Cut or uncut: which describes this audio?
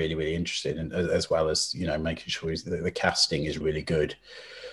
cut